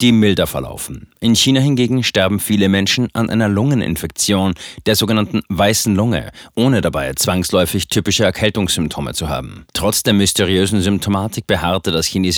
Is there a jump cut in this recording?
yes; 1 cut; at 9.7 s

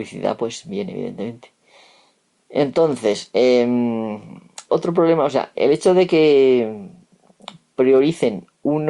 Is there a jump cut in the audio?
yes; 2 cuts; at 4.7 s, 5.5 s

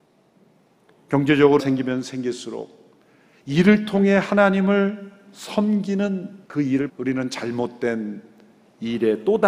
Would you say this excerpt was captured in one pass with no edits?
no; 3 cuts; at 1.6 s, 6.4 s, 6.9 s

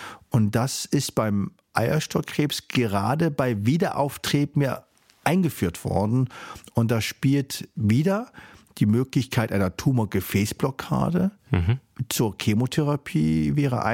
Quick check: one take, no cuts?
yes; 0 cuts

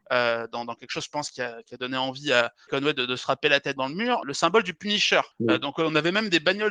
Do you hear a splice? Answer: yes; 4 cuts; at 2.7 s, 3.8 s, 4.2 s, 5.3 s

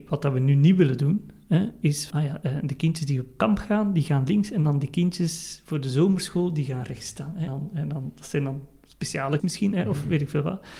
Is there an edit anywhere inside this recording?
yes; 3 cuts; at 2.1 s, 7.5 s, 9.4 s

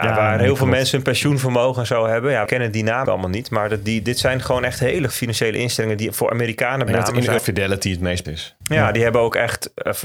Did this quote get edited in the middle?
yes; 6 cuts; at 2.5 s, 3.1 s, 5.1 s, 6.9 s, 7.4 s, 8.2 s

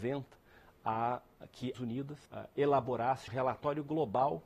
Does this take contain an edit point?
yes; 3 cuts; at 1.7 s, 2.3 s, 3.3 s

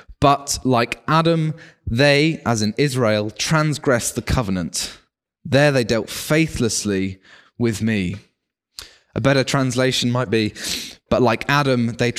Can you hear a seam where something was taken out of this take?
no; 0 cuts

